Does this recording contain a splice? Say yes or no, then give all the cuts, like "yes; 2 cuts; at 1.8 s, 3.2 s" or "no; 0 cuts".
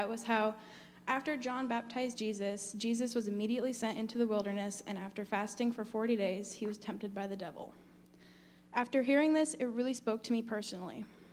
no; 0 cuts